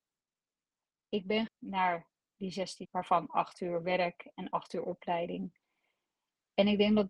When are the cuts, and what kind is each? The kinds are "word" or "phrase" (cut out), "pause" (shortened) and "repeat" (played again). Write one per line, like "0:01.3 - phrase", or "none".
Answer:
0:01.5 - word
0:02.8 - word